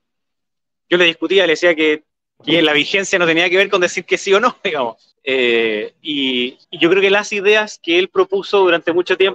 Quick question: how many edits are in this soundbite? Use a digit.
3